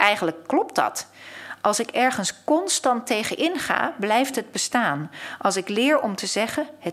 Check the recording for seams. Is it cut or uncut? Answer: uncut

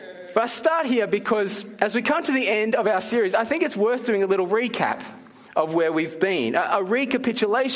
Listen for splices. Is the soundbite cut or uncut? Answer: uncut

